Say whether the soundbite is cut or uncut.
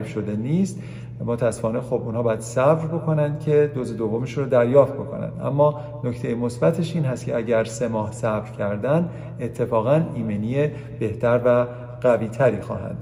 uncut